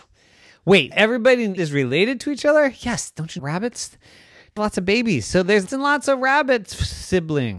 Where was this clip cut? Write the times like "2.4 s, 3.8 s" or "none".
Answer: 0.9 s, 1.6 s, 3.4 s, 4.6 s, 5.7 s